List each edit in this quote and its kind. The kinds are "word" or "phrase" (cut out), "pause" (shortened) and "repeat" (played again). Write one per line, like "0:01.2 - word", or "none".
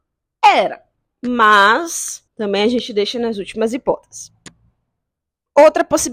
0:02.3 - pause